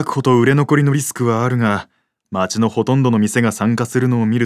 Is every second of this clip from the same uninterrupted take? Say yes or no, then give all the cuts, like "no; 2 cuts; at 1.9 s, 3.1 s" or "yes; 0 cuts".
yes; 0 cuts